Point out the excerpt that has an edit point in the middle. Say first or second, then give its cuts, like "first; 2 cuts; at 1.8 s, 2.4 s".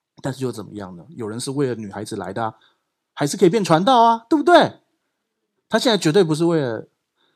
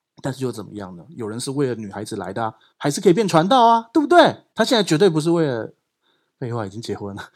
second; 2 cuts; at 2.7 s, 4.5 s